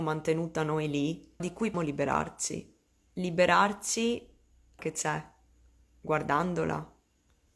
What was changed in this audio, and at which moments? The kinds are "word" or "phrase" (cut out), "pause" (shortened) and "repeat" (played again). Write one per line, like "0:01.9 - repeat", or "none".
0:01.4 - word
0:01.7 - word
0:04.8 - word